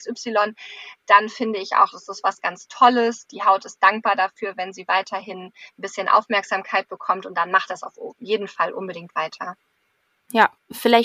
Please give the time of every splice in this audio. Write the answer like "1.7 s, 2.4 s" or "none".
none